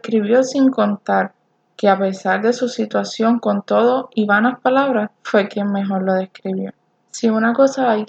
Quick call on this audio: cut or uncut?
cut